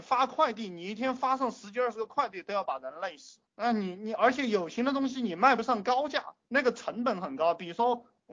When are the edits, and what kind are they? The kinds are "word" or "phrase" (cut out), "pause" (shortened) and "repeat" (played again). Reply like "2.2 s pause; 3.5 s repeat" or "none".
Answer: 3.5 s pause; 6.4 s pause